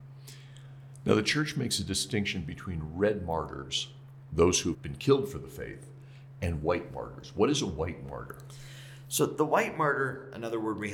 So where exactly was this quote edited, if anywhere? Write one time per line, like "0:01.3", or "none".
0:04.7